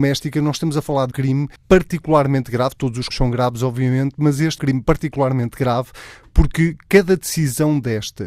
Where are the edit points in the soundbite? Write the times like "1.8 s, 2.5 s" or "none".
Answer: 1.1 s, 1.6 s, 3.1 s, 4.6 s